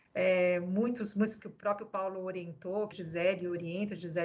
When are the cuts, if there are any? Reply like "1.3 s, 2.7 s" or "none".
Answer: 1.4 s, 2.9 s